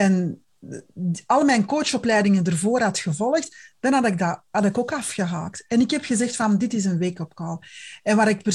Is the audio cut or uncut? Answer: uncut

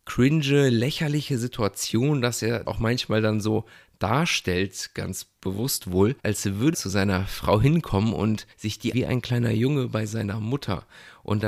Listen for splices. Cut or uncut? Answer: cut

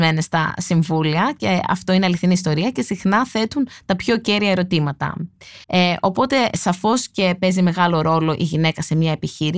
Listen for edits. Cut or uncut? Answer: cut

